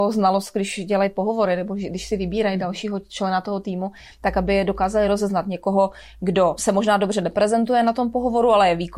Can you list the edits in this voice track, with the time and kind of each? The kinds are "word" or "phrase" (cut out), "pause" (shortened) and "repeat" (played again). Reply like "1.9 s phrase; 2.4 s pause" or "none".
6.6 s word

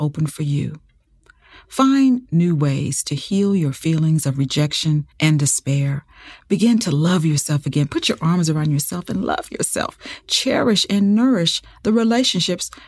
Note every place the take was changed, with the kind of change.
5.1 s pause

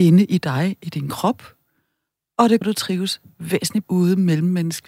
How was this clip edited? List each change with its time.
2.6 s word; 3.8 s word

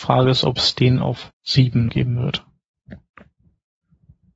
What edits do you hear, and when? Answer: 1.3 s word; 1.9 s word

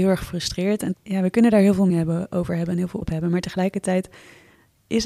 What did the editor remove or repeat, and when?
0.9 s word; 1.9 s word; 3.0 s word

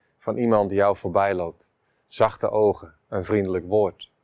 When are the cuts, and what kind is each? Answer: none

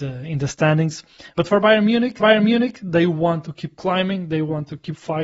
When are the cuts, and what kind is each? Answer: 2.2 s repeat

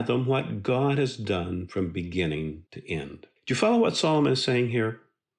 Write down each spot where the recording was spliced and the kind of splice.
2.7 s pause; 3.4 s pause

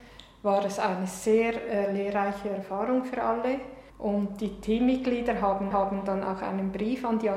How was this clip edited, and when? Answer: 3.9 s pause; 5.7 s repeat

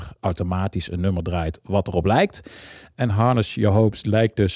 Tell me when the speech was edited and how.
none

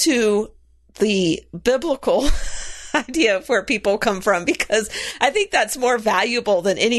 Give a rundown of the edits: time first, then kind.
none

